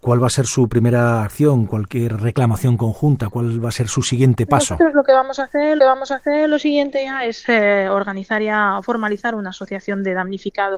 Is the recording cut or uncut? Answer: cut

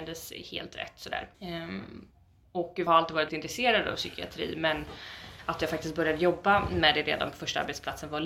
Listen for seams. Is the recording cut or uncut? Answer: cut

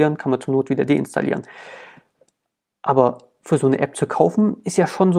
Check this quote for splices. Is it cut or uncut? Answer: uncut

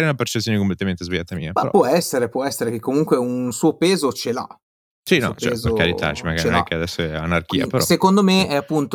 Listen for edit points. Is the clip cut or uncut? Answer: uncut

